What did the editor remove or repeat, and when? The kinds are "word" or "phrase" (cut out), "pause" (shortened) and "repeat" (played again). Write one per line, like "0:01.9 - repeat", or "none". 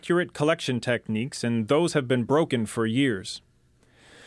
none